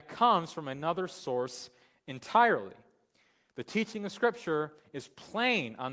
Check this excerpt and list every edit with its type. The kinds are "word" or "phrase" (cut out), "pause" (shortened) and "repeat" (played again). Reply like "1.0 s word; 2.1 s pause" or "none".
none